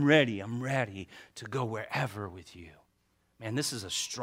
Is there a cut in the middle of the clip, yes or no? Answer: no